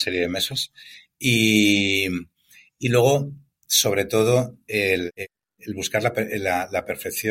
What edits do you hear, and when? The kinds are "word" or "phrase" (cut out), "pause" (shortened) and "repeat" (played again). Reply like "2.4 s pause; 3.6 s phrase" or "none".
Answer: none